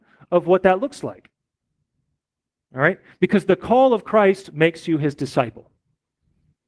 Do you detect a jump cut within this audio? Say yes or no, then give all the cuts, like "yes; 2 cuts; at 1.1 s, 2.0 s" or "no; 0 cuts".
no; 0 cuts